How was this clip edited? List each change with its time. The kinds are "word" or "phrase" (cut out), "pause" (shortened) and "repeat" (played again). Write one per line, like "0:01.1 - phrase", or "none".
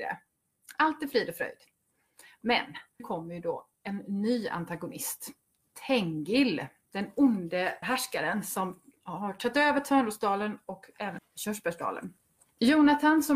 0:03.0 - word
0:07.8 - word
0:11.2 - word